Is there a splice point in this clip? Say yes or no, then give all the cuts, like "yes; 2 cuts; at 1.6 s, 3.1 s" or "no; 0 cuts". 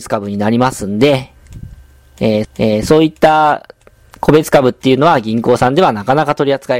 yes; 1 cut; at 2.4 s